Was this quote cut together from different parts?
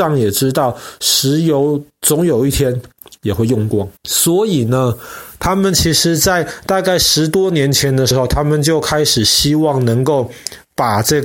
yes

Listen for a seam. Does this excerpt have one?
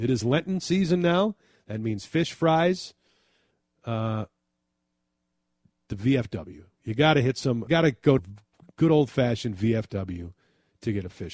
yes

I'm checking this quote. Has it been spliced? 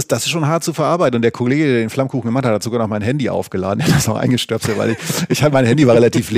no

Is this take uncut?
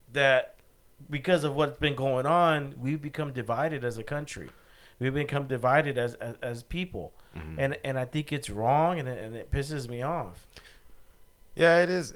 yes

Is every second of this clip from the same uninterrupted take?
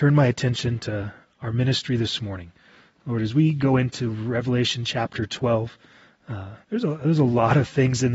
no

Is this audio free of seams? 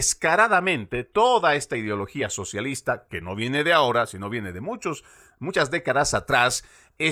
yes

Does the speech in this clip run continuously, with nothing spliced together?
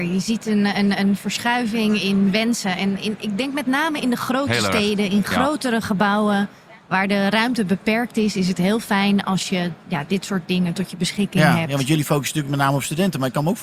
yes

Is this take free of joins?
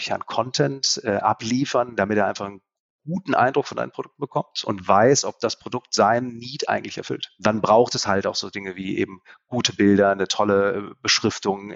yes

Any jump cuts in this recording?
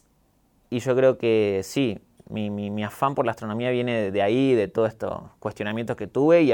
no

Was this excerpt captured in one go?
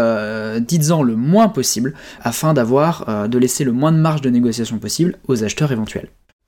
no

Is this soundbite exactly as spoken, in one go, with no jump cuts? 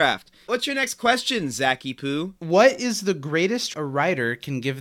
no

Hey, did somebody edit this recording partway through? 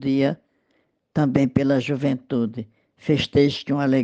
no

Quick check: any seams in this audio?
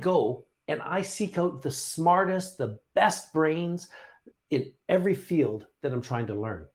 no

